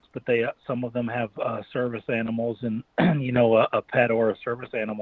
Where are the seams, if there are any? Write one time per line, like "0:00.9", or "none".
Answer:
none